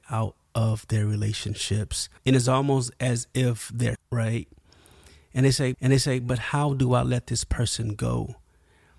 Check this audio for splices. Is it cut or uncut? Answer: cut